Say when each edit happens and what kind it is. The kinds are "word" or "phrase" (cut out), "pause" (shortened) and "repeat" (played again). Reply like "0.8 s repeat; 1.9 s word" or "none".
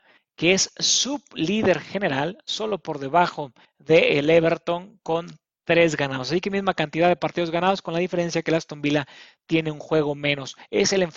none